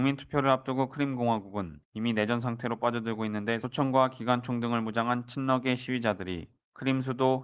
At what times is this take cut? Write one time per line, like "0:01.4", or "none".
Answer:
0:01.8